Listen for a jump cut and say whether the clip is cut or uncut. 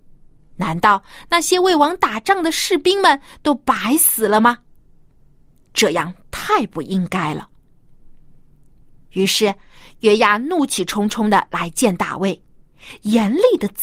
uncut